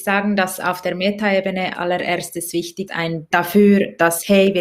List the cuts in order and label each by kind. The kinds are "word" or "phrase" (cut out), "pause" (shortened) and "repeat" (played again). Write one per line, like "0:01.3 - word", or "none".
0:01.7 - word
0:02.9 - word
0:03.3 - word